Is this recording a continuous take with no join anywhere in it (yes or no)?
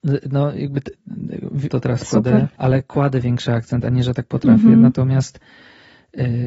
no